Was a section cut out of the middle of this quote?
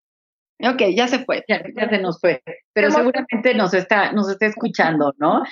yes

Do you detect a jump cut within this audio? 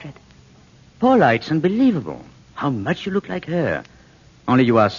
no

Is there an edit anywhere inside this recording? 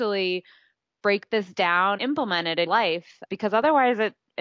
yes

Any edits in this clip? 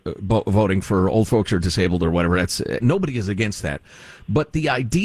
no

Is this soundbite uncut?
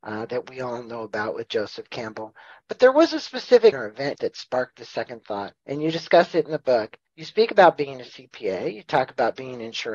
no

